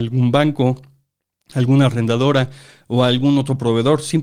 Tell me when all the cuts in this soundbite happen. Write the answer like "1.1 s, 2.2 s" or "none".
none